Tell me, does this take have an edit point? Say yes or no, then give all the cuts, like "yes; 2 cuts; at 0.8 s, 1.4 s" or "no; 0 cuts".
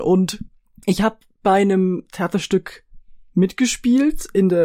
no; 0 cuts